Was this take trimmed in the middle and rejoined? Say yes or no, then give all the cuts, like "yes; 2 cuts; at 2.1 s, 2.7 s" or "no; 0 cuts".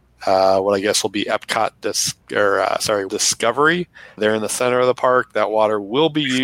yes; 3 cuts; at 2.2 s, 3.1 s, 4.2 s